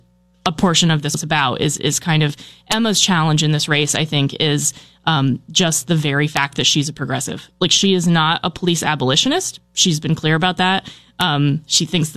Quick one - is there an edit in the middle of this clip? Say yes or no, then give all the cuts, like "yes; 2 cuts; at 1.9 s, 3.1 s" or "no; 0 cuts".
yes; 1 cut; at 1.1 s